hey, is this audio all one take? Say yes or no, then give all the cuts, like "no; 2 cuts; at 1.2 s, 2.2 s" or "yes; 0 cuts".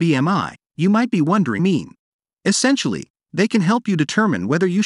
no; 2 cuts; at 1.6 s, 2.3 s